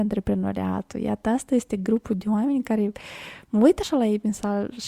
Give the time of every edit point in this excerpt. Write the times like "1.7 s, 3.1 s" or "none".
none